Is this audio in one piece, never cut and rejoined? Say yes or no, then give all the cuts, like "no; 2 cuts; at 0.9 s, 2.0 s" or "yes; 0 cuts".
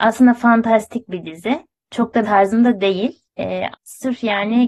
no; 2 cuts; at 2.2 s, 3.7 s